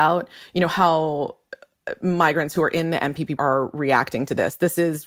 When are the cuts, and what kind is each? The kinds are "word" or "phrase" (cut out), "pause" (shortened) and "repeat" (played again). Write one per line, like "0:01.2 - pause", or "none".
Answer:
0:03.4 - word

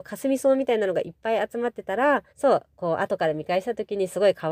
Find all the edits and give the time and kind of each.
0:02.3 - pause

